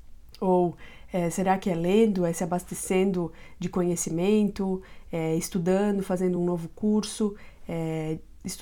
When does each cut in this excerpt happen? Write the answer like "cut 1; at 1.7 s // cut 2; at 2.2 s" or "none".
none